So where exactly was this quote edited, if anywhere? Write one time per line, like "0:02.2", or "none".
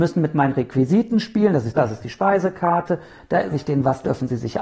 0:01.8
0:03.5